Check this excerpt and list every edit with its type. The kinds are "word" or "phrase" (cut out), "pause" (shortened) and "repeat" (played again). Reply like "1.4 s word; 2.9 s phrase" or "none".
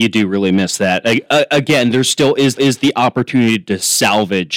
1.3 s word; 2.6 s repeat